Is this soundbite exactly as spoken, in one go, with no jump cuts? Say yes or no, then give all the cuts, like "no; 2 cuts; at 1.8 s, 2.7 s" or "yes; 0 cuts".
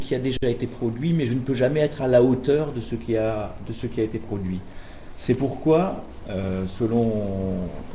yes; 0 cuts